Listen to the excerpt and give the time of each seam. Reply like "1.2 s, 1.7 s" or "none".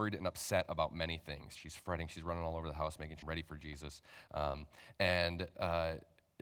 3.2 s